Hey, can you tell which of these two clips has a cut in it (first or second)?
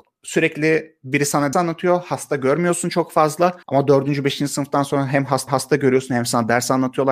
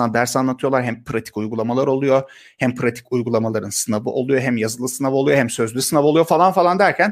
first